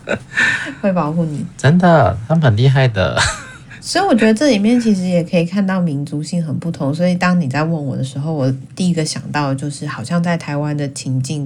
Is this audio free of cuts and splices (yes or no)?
yes